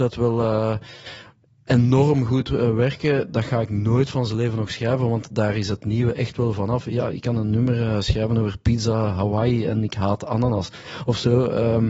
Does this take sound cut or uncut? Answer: uncut